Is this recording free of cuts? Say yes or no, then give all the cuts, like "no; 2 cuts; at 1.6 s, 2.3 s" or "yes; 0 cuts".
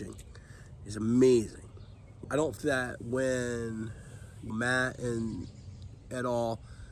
no; 3 cuts; at 2.2 s, 2.6 s, 4.5 s